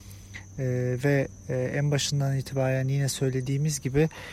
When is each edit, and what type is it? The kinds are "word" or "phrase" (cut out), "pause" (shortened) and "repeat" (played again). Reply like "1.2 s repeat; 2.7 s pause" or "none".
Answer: none